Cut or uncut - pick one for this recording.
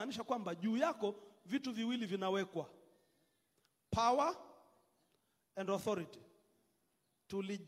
uncut